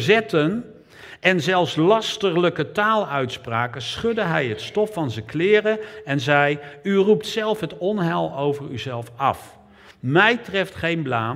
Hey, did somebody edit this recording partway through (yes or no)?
no